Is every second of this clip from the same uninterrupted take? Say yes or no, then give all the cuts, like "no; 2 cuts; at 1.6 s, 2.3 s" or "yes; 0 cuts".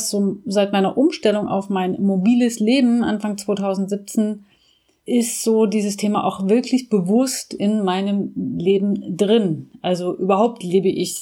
yes; 0 cuts